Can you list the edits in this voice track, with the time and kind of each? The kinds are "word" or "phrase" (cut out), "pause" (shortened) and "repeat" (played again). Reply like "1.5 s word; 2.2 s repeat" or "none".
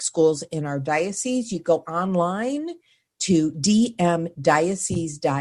none